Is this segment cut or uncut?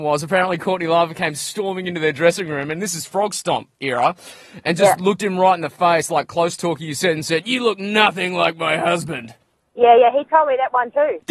uncut